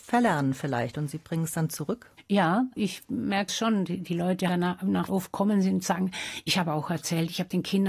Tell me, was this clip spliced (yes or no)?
yes